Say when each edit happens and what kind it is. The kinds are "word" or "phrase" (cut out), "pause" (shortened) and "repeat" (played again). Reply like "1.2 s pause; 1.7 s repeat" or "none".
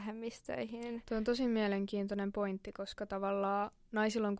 none